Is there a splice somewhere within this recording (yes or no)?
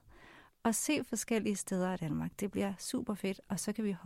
no